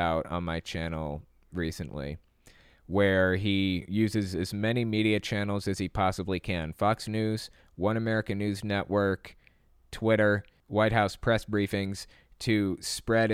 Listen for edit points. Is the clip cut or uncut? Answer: uncut